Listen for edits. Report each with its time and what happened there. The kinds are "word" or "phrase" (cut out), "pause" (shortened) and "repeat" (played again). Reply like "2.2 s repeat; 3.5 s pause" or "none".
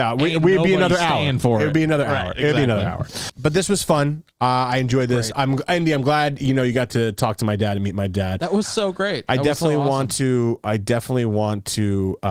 none